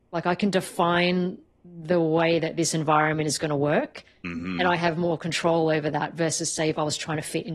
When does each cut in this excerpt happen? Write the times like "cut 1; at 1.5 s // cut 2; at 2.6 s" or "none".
none